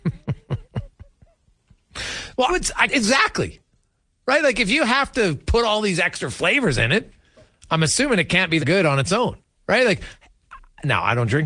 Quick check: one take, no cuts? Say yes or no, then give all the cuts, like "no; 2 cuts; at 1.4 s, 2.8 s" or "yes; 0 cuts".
no; 4 cuts; at 2.5 s, 2.9 s, 8.6 s, 9.4 s